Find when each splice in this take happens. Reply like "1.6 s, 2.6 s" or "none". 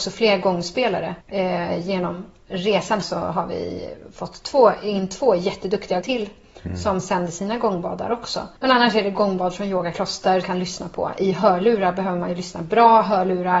1.2 s, 3.0 s, 6.0 s, 8.6 s, 10.4 s